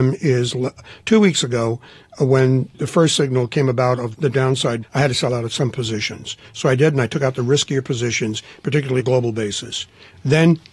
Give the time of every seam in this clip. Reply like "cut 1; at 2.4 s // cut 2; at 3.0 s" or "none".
cut 1; at 2.7 s // cut 2; at 4.1 s // cut 3; at 4.8 s // cut 4; at 9.0 s